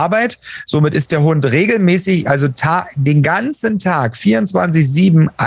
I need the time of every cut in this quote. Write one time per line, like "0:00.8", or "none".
none